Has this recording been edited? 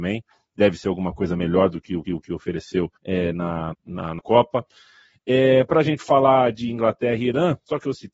yes; 4 cuts; at 2.0 s, 3.0 s, 3.7 s, 4.2 s

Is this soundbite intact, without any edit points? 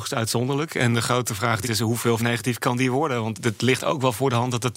no; 3 cuts; at 1.6 s, 2.2 s, 3.3 s

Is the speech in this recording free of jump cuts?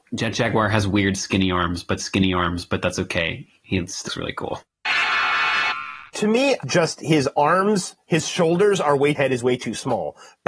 no; 5 cuts; at 2.0 s, 4.1 s, 6.1 s, 6.6 s, 9.1 s

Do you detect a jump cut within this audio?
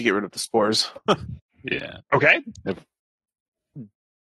yes; 1 cut; at 2.0 s

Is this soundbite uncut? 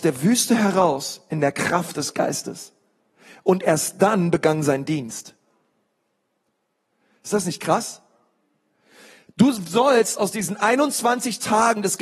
yes; 0 cuts

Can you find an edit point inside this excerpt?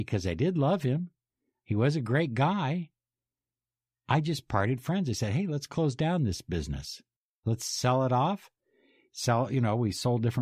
no; 0 cuts

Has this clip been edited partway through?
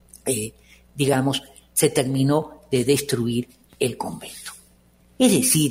no; 0 cuts

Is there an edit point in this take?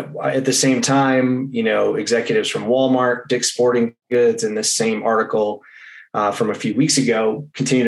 no; 0 cuts

